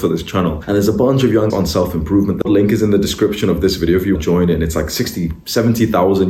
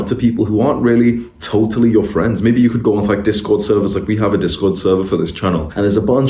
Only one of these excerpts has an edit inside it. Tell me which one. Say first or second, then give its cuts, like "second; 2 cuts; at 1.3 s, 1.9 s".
first; 3 cuts; at 1.5 s, 2.4 s, 4.1 s